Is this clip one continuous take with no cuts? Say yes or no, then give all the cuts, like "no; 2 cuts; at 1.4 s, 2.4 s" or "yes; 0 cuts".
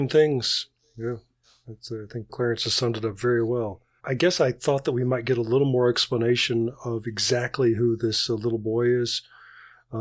no; 2 cuts; at 2.3 s, 4.0 s